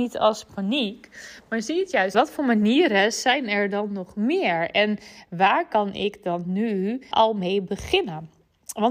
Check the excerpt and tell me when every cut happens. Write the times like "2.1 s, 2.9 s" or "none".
2.1 s, 7.1 s